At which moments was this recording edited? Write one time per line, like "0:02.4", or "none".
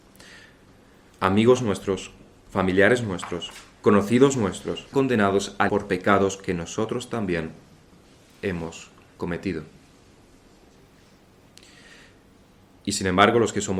0:04.9
0:05.7